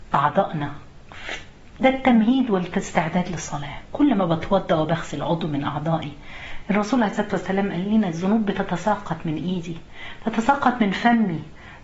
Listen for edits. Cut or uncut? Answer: uncut